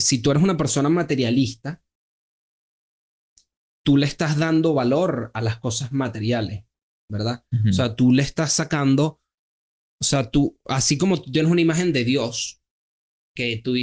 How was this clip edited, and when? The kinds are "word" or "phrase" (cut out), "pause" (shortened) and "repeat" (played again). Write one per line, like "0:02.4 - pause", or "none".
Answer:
none